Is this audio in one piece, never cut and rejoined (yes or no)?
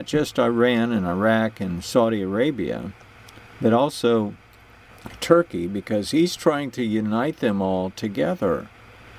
yes